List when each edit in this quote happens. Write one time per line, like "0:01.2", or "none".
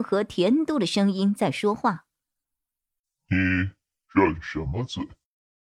none